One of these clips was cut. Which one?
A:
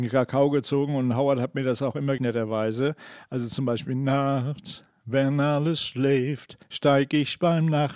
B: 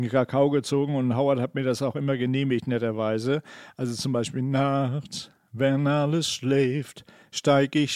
A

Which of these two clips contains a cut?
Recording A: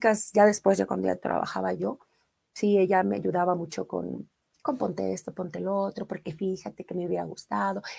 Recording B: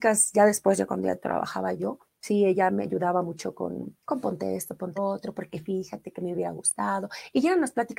B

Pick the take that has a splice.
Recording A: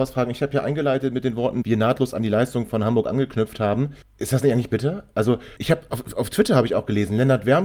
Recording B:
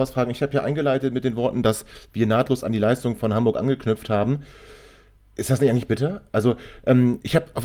A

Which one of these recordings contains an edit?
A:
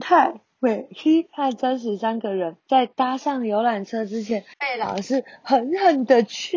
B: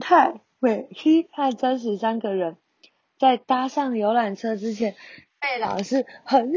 A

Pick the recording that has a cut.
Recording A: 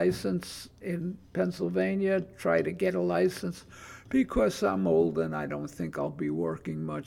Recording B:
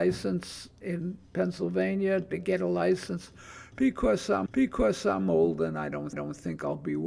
B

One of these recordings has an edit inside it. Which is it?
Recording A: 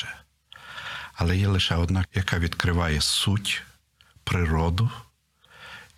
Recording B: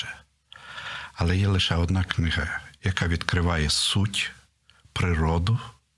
A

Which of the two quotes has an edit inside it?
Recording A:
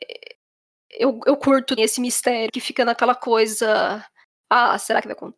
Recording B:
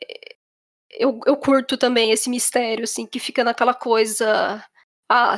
A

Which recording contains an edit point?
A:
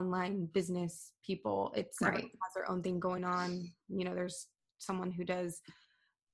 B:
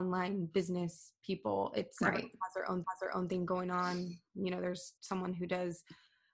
B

